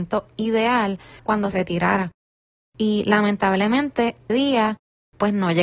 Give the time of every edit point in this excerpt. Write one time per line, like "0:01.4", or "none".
0:01.2
0:01.5
0:04.3